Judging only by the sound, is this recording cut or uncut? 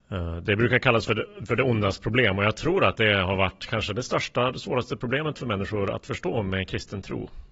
uncut